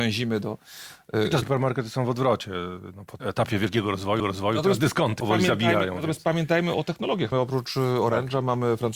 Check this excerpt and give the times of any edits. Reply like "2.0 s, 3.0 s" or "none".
1.4 s, 3.2 s, 4.2 s, 5.2 s, 6.7 s, 7.3 s